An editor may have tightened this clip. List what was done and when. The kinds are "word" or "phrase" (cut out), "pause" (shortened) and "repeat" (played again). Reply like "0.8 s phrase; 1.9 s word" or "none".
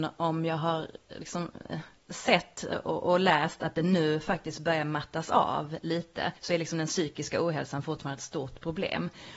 2.0 s pause; 6.4 s pause